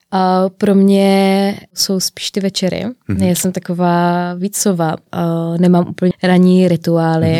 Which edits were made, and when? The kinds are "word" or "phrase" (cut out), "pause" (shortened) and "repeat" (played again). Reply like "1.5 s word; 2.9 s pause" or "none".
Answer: 6.1 s phrase